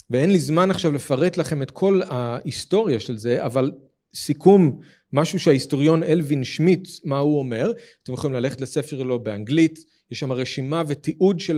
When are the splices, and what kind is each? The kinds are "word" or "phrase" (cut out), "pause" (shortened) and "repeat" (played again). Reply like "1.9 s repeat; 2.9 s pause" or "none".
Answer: none